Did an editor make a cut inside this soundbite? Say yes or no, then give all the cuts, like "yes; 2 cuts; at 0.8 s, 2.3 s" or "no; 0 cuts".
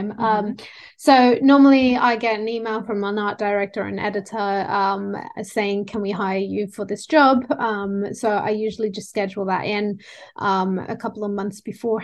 no; 0 cuts